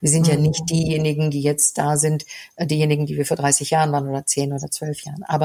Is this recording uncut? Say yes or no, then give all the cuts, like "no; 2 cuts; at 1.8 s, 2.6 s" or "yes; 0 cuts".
yes; 0 cuts